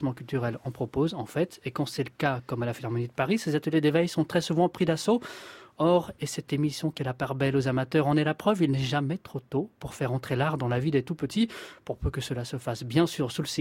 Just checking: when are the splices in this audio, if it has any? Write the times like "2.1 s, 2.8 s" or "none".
7.0 s

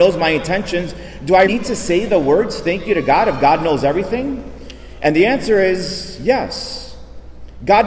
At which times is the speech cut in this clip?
1.4 s

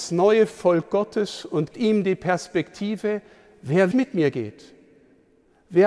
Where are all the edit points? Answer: 1.7 s, 3.9 s

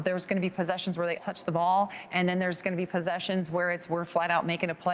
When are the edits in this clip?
1.2 s

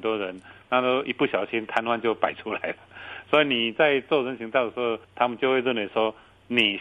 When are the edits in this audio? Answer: 5.0 s

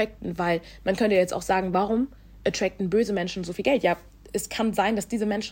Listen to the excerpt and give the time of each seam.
none

